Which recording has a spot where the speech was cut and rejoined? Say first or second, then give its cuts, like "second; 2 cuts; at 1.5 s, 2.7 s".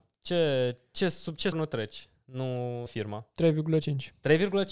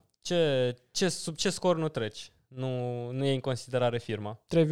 first; 2 cuts; at 1.5 s, 2.9 s